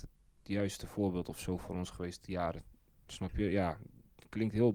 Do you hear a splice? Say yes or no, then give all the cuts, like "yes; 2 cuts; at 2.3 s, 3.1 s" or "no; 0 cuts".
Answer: no; 0 cuts